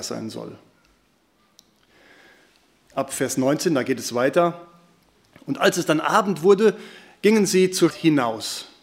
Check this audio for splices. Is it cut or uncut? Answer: cut